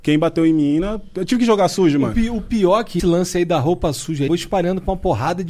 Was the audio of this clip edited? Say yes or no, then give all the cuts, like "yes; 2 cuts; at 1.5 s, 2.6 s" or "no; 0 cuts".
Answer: yes; 2 cuts; at 3.0 s, 4.3 s